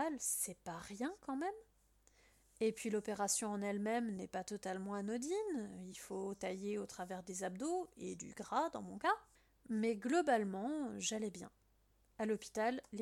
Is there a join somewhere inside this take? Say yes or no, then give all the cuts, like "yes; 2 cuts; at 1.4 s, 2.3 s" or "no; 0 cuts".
no; 0 cuts